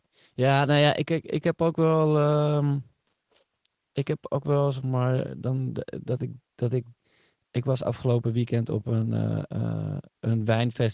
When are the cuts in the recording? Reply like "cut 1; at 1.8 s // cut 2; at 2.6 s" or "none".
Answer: none